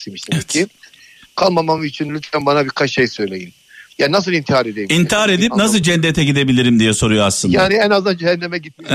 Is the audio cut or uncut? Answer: uncut